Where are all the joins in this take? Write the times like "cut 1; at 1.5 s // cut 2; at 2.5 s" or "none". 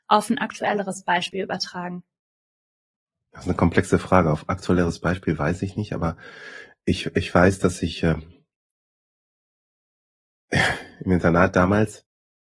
none